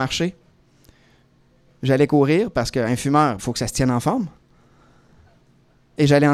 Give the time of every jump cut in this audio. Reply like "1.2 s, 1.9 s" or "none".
3.4 s